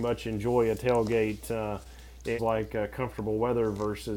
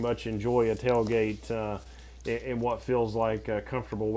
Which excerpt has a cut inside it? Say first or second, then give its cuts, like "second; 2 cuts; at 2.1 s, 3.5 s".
first; 1 cut; at 2.4 s